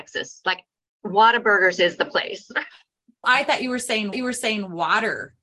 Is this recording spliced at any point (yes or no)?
yes